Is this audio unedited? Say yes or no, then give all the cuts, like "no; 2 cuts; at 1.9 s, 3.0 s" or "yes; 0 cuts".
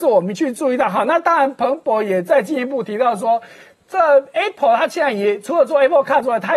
yes; 0 cuts